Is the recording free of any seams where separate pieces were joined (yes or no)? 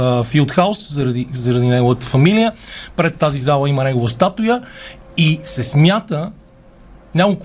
yes